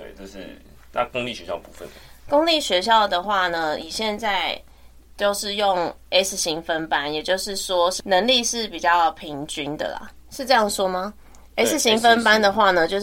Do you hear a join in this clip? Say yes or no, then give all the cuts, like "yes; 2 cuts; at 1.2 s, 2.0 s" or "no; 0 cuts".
no; 0 cuts